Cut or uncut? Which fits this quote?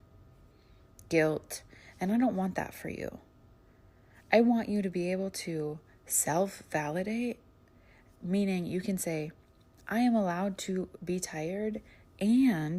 uncut